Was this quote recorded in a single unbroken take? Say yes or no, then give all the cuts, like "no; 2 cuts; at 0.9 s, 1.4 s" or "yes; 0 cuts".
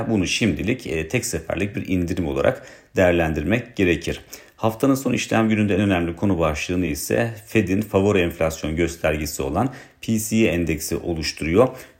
yes; 0 cuts